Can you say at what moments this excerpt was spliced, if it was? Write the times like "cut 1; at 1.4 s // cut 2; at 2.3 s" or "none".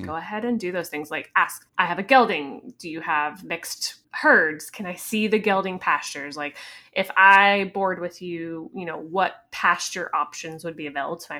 cut 1; at 1.7 s // cut 2; at 4.0 s